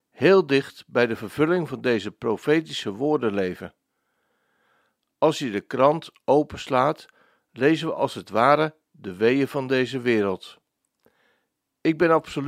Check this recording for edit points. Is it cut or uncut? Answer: uncut